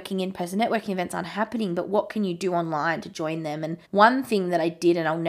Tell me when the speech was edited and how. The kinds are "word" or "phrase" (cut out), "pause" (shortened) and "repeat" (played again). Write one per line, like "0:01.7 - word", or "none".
0:03.8 - pause